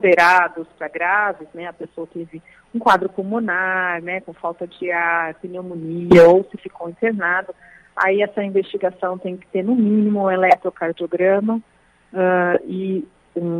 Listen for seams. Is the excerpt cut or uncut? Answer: uncut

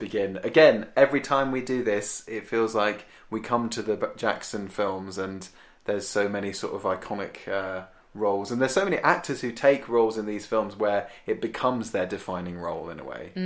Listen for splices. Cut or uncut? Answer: uncut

